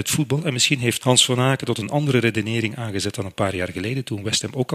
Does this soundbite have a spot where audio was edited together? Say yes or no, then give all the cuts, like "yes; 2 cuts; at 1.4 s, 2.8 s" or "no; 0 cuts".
yes; 1 cut; at 1.0 s